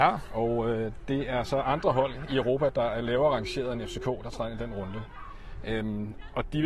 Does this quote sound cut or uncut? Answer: uncut